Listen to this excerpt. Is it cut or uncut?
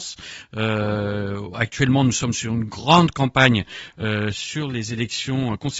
uncut